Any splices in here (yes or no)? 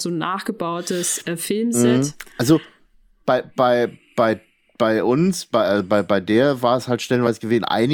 no